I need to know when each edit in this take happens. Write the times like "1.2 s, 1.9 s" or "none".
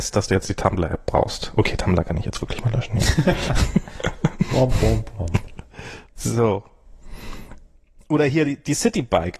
none